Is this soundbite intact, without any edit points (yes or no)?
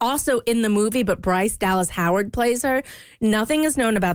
yes